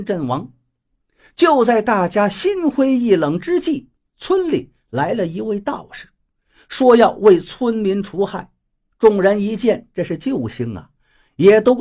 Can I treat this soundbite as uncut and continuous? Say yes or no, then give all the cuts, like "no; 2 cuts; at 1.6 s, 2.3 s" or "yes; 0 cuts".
yes; 0 cuts